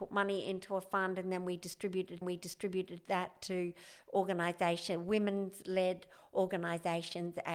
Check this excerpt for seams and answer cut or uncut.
cut